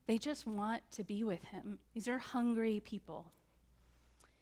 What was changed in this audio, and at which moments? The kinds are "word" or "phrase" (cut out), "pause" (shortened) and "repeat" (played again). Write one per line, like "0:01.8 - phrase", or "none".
0:01.9 - pause